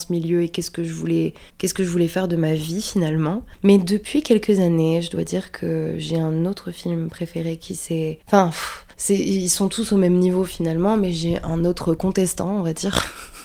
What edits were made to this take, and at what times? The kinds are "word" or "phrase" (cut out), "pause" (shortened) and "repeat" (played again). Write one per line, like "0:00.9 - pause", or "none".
0:01.5 - pause
0:08.2 - pause
0:08.9 - pause